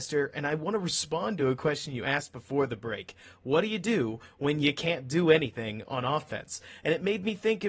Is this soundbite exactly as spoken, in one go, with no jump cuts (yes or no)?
yes